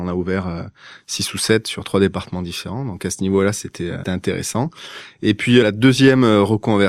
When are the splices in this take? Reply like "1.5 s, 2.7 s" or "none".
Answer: 4.0 s, 5.6 s